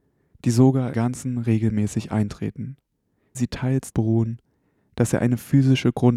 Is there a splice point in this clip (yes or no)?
yes